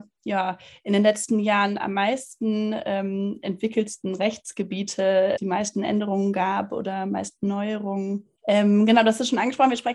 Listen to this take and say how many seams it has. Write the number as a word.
two